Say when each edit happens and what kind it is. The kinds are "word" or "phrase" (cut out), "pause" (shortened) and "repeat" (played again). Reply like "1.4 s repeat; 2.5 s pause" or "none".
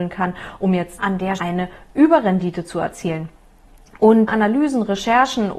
1.0 s word; 1.4 s word; 4.3 s word